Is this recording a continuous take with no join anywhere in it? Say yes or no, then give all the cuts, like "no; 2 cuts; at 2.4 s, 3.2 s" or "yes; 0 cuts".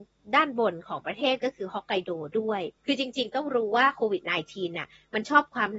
no; 1 cut; at 2.8 s